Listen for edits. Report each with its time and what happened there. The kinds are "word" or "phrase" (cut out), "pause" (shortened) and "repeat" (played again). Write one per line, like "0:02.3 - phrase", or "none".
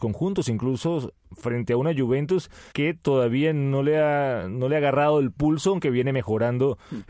0:02.7 - pause